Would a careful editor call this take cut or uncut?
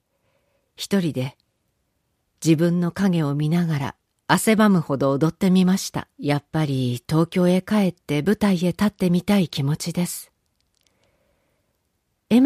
cut